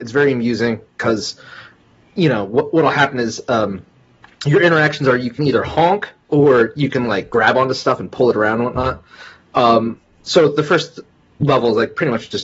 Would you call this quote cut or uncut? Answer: uncut